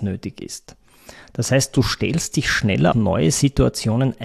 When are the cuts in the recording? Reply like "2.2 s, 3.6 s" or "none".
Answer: 2.9 s